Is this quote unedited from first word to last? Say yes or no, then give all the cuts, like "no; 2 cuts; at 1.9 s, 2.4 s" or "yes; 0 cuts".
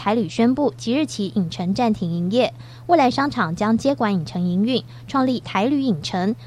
no; 1 cut; at 5.4 s